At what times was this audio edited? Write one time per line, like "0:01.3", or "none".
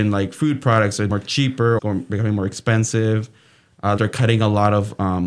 0:01.1
0:01.8
0:04.0